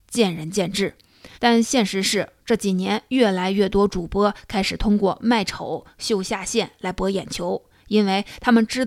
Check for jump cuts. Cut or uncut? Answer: cut